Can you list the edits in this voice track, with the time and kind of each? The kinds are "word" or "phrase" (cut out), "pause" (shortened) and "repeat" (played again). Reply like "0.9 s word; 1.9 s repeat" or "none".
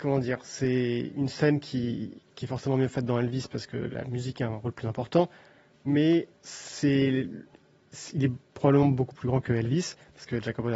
2.2 s pause; 6.3 s pause; 8.5 s pause